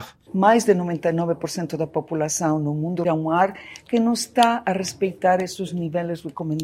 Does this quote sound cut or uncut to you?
cut